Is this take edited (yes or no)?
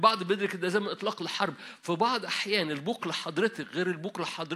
no